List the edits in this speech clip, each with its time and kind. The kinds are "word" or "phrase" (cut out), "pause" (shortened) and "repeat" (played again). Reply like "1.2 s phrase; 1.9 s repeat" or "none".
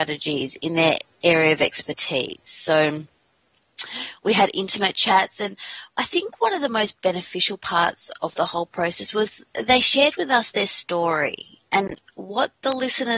9.5 s pause